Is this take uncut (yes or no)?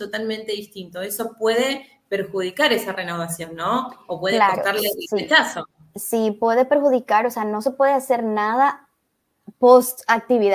yes